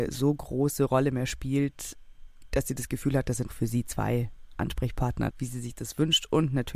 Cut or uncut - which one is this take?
cut